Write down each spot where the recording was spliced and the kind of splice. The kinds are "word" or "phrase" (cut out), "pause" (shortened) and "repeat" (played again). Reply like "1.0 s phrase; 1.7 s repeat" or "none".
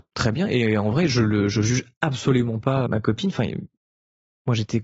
2.9 s word